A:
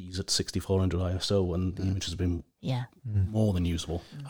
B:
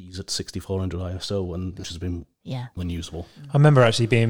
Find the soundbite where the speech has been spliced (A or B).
B